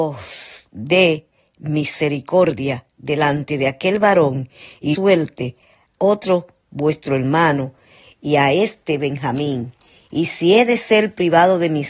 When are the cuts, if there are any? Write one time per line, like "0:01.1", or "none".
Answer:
0:04.9
0:06.0